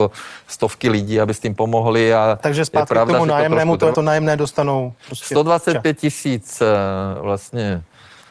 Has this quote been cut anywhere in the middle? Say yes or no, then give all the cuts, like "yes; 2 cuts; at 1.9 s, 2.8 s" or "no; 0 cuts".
yes; 1 cut; at 3.9 s